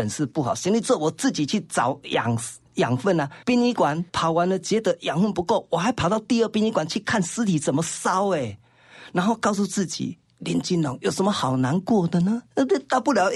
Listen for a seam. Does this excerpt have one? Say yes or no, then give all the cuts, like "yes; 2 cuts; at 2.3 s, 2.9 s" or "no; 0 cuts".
yes; 4 cuts; at 2.6 s, 3.4 s, 4.1 s, 12.5 s